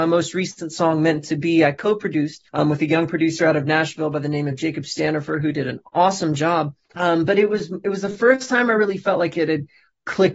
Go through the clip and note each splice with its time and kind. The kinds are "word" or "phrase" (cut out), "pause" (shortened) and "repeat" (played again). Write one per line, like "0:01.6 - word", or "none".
0:02.5 - pause
0:06.8 - pause